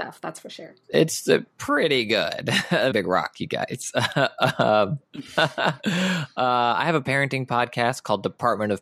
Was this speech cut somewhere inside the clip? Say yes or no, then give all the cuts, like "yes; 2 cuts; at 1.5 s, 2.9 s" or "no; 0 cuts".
yes; 1 cut; at 2.9 s